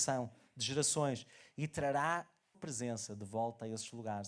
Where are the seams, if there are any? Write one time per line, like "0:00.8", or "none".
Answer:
0:02.5